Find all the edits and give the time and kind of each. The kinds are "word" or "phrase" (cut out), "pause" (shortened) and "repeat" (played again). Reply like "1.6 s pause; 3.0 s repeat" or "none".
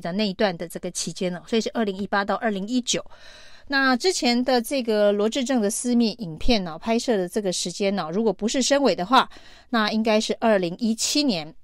none